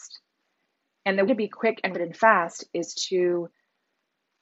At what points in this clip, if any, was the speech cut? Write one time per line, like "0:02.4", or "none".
0:01.3
0:01.9

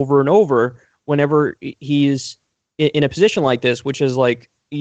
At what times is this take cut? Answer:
none

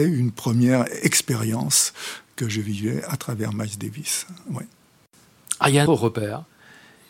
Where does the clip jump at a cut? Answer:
0:05.9

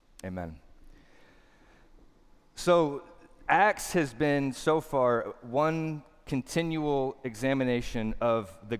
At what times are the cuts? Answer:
none

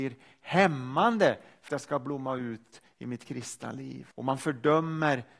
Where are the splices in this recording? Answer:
0:01.7
0:04.1

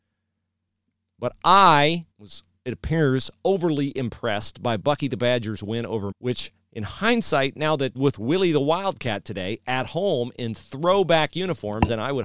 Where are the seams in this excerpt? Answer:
0:02.1
0:06.1
0:07.9

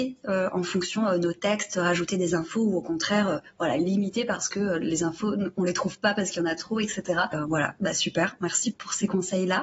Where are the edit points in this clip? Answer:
0:08.7

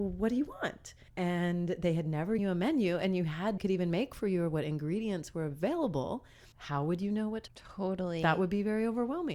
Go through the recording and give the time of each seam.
0:01.1
0:02.4
0:03.6
0:06.5
0:07.5

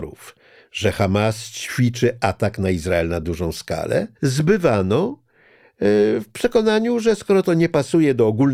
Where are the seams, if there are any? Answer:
0:04.2

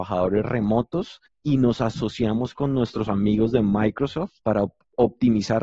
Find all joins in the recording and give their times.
0:04.4

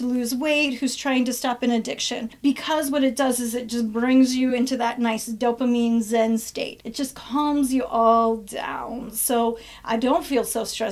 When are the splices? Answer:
none

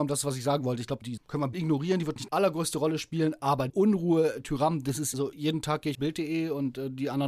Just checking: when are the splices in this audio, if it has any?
0:01.2
0:01.5
0:02.3
0:03.7
0:05.1
0:05.9

